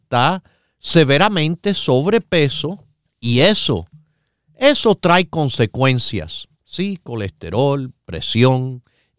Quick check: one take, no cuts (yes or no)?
no